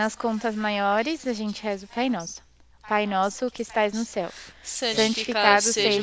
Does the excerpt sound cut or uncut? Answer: uncut